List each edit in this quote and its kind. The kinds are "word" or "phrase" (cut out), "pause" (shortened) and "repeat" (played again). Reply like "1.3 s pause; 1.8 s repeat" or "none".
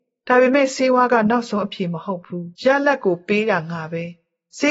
2.6 s pause